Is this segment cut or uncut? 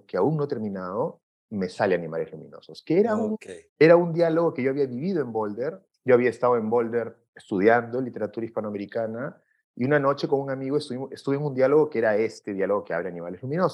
cut